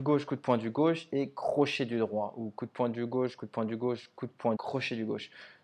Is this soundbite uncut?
no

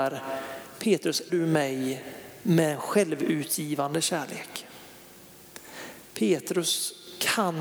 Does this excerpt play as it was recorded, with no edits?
no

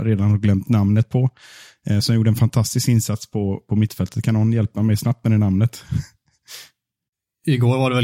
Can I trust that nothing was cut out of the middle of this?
yes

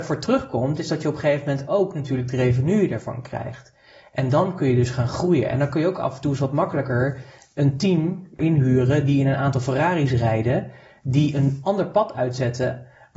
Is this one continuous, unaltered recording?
yes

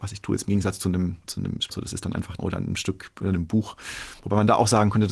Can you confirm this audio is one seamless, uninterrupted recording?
no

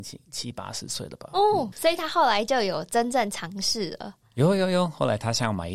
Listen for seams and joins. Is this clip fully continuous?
no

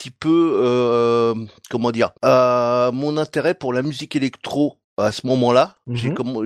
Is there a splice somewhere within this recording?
no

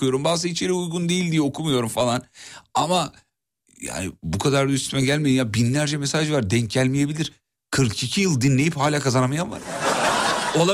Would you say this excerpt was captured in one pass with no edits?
yes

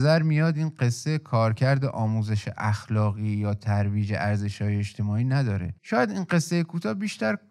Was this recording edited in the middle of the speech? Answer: yes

